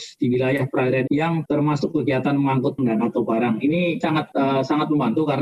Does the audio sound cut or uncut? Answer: cut